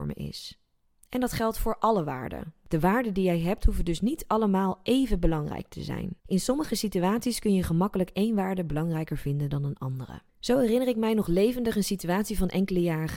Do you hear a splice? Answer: yes; 2 cuts; at 6.2 s, 10.3 s

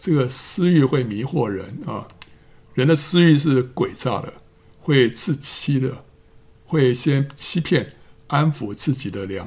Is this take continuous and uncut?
yes; 0 cuts

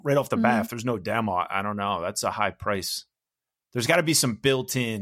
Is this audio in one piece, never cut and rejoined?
yes; 0 cuts

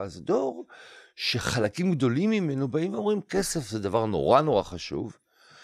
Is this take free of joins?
yes; 0 cuts

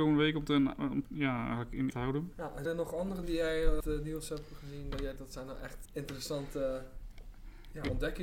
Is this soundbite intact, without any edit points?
no; 7 cuts; at 1.0 s, 1.9 s, 2.6 s, 3.2 s, 3.8 s, 5.2 s, 5.8 s

